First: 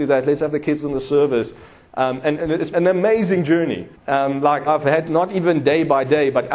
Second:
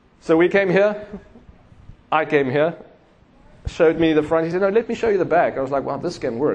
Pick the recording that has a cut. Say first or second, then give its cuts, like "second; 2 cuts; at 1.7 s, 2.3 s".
first; 5 cuts; at 2.4 s, 2.7 s, 3.9 s, 4.7 s, 5.1 s